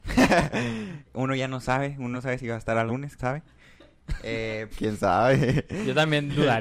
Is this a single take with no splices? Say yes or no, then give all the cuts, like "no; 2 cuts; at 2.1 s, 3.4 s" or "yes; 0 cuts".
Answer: no; 5 cuts; at 1.0 s, 2.1 s, 2.9 s, 3.2 s, 4.7 s